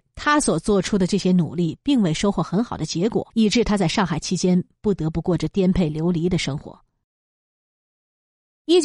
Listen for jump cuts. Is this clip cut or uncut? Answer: cut